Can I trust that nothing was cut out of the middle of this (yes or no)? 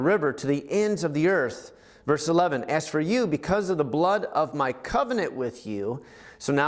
yes